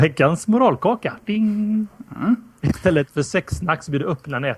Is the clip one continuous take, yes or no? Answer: yes